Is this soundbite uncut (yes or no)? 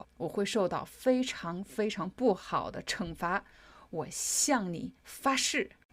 no